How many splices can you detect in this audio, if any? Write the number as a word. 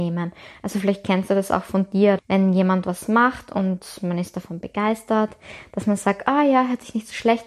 one